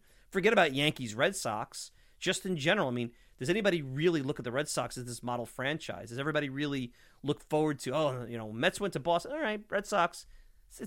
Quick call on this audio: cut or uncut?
uncut